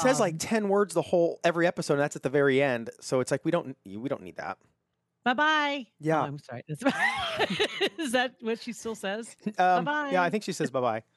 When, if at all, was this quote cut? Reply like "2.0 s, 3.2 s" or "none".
none